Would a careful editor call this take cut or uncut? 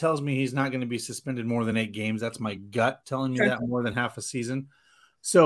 uncut